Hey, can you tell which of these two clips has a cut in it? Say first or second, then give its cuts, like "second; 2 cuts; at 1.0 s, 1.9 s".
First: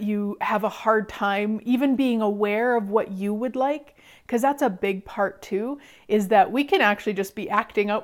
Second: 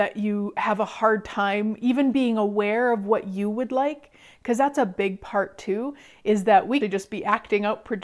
second; 1 cut; at 6.8 s